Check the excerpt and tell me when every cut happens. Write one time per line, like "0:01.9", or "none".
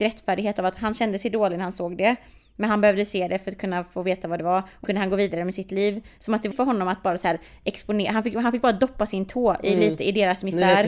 0:04.8
0:06.5